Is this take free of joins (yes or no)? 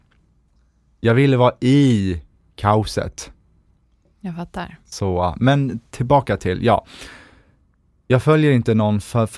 yes